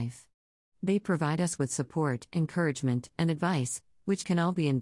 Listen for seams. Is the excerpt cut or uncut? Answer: uncut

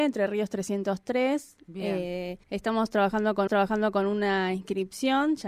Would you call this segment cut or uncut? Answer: cut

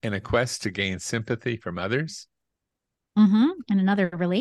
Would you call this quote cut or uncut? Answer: uncut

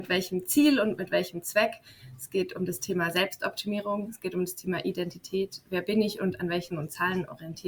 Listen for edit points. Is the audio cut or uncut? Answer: cut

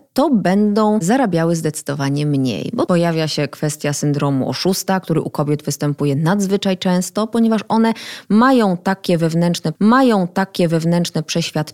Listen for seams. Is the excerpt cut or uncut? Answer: cut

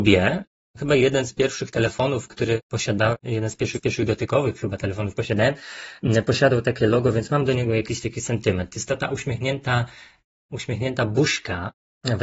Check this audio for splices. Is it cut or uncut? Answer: cut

